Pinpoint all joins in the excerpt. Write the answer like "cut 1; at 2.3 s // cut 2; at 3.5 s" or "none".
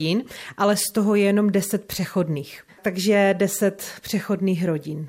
cut 1; at 2.7 s